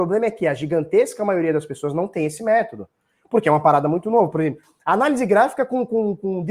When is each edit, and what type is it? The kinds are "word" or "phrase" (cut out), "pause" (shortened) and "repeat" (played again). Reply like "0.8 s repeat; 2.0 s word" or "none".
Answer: none